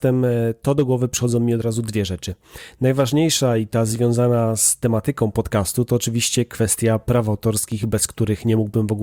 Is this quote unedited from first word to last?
yes; 0 cuts

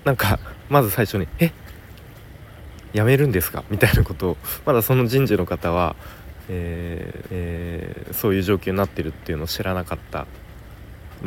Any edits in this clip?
yes; 1 cut; at 7.3 s

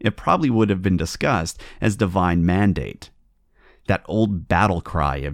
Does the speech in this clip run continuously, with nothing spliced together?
yes; 0 cuts

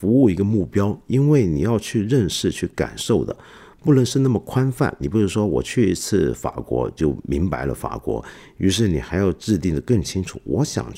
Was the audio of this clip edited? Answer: no; 0 cuts

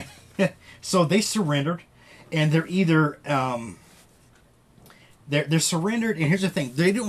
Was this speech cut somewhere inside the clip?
no; 0 cuts

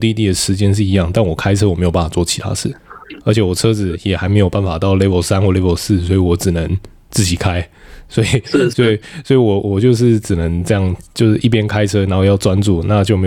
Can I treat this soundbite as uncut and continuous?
yes; 0 cuts

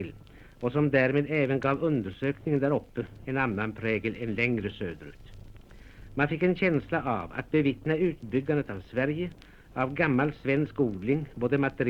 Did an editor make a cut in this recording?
no; 0 cuts

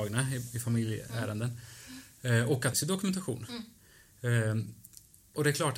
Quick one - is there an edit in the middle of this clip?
yes; 1 cut; at 2.7 s

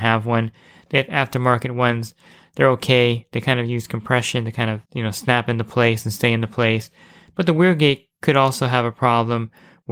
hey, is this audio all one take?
no; 1 cut; at 4.9 s

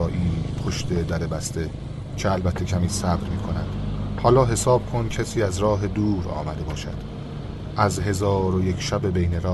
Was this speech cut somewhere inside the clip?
no; 0 cuts

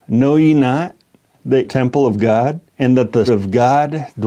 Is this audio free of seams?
no; 3 cuts; at 1.6 s, 2.7 s, 3.3 s

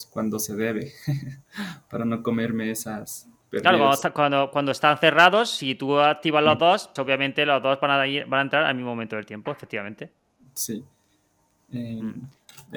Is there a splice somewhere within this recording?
yes; 1 cut; at 7.0 s

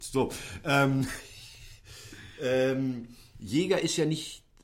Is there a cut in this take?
no; 0 cuts

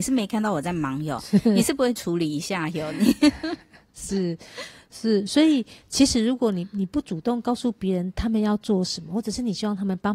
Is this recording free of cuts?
yes; 0 cuts

